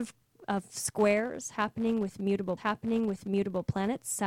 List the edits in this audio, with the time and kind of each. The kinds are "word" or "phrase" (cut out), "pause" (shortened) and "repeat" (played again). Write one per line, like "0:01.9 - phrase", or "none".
0:02.6 - repeat